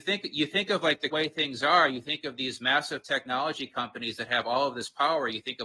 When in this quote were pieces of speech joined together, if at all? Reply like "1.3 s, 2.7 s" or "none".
1.1 s